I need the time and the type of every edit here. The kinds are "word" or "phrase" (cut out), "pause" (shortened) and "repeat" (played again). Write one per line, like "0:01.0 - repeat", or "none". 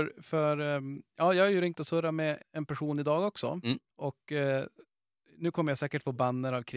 0:02.4 - word
0:03.9 - pause